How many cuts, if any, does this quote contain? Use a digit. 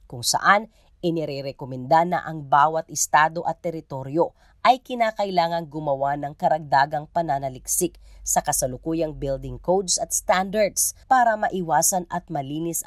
1